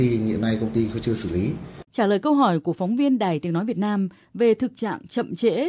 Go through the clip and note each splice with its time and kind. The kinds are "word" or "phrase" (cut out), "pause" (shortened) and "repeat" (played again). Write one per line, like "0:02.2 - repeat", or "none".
0:01.9 - pause